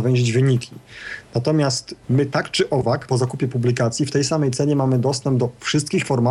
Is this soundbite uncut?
no; 2 cuts; at 2.0 s, 3.1 s

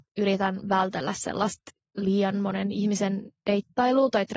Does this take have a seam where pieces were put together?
no; 0 cuts

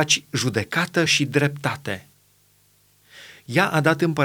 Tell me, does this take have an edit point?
no; 0 cuts

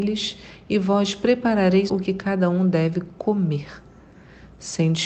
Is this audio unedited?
no; 1 cut; at 1.9 s

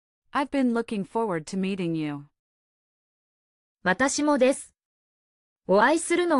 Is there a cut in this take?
no; 0 cuts

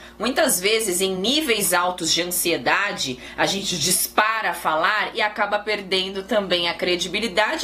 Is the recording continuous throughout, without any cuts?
yes; 0 cuts

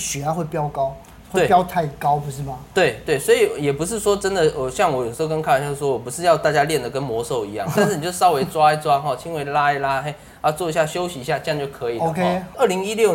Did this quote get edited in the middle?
yes; 1 cut; at 7.8 s

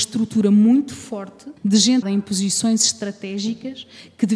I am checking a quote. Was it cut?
yes; 2 cuts; at 1.6 s, 2.0 s

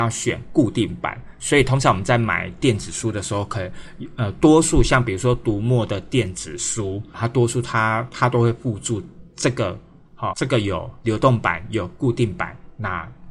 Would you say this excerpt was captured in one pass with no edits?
no; 2 cuts; at 7.1 s, 10.3 s

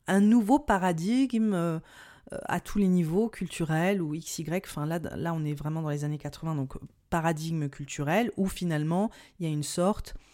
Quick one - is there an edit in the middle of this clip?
no; 0 cuts

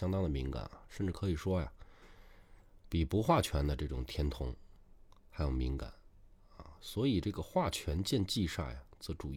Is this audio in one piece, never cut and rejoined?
yes; 0 cuts

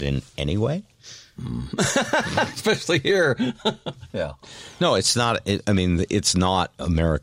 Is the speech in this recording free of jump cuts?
yes; 0 cuts

